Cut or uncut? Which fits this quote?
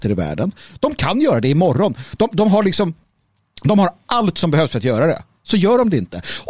uncut